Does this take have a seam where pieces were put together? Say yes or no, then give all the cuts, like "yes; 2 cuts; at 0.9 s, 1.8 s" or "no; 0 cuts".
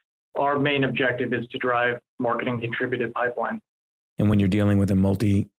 no; 0 cuts